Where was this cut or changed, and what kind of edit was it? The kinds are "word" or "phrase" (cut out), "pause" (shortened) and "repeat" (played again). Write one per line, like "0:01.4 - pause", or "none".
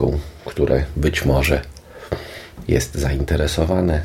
none